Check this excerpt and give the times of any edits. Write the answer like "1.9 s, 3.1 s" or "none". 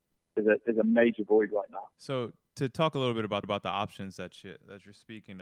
1.9 s, 3.4 s